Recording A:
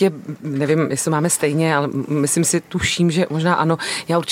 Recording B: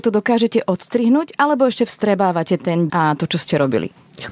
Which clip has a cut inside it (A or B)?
B